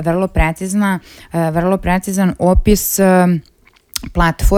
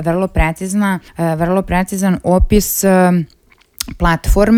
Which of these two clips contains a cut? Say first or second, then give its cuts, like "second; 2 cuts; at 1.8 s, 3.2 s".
second; 1 cut; at 1.1 s